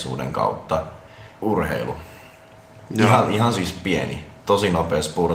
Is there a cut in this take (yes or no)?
yes